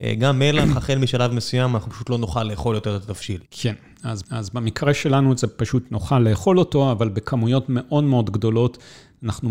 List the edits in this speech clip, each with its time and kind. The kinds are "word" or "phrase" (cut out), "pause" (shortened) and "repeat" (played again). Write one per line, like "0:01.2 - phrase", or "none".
0:03.4 - pause
0:04.2 - repeat